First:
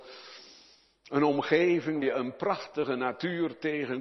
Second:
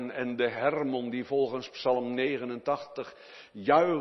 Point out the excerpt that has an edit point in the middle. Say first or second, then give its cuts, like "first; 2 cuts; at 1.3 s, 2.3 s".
first; 1 cut; at 2.0 s